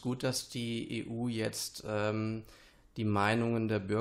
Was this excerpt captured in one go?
yes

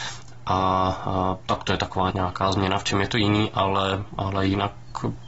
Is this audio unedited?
no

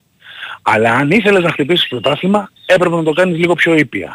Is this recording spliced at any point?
yes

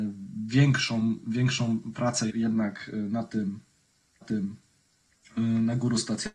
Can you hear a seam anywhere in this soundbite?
yes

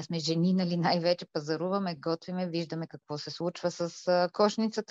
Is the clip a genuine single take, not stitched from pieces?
yes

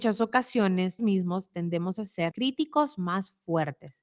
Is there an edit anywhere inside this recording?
yes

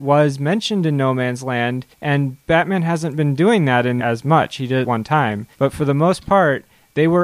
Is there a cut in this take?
yes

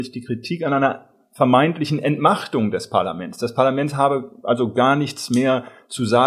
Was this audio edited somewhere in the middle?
no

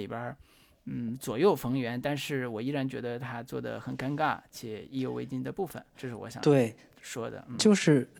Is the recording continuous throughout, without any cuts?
no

